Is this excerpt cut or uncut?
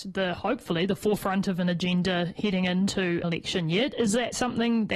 cut